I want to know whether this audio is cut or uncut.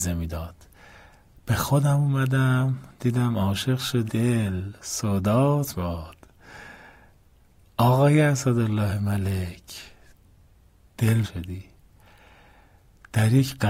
cut